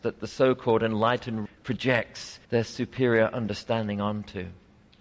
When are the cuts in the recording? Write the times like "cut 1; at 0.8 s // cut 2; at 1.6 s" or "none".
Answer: cut 1; at 1.5 s // cut 2; at 2.4 s